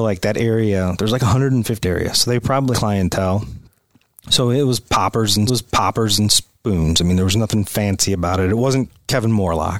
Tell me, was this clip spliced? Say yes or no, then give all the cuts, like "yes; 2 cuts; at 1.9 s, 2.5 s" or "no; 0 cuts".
yes; 3 cuts; at 1.8 s, 2.7 s, 5.5 s